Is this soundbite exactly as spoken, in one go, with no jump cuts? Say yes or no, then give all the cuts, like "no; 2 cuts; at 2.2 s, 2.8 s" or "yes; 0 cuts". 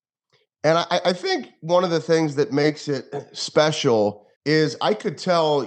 no; 1 cut; at 4.4 s